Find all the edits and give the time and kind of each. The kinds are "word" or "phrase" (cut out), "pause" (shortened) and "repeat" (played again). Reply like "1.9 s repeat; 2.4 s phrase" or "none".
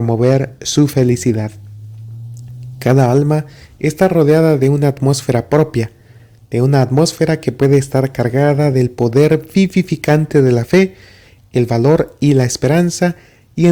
none